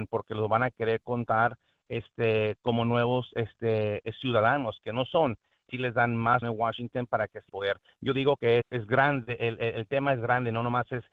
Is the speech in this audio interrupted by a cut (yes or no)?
yes